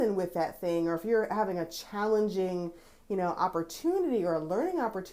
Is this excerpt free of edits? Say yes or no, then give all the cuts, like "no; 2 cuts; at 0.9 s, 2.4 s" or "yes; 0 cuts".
yes; 0 cuts